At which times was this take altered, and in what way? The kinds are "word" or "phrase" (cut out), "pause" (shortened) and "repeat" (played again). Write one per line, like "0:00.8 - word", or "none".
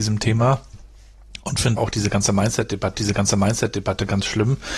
0:01.8 - word
0:02.9 - repeat